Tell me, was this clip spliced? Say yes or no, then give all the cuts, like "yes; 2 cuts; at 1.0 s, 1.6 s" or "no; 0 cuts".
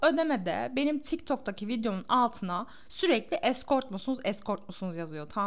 no; 0 cuts